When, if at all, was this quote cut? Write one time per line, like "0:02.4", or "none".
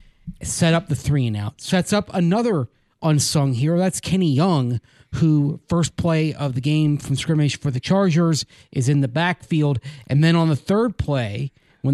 none